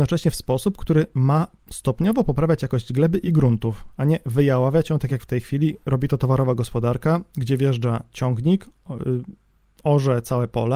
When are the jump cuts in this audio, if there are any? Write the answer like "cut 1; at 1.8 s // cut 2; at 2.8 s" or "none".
none